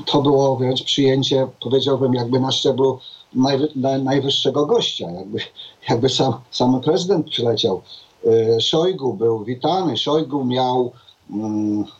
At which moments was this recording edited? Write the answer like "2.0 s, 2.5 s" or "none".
6.4 s